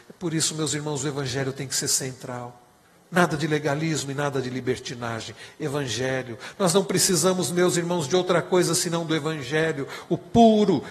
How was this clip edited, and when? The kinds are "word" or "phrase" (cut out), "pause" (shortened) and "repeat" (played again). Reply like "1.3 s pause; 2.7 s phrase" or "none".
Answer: 2.8 s pause